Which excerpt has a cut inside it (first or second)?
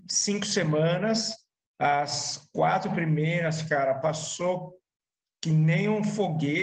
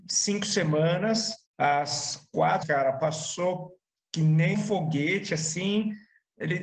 second